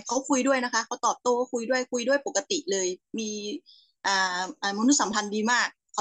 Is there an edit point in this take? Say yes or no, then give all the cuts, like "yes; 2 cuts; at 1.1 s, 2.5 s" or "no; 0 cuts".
no; 0 cuts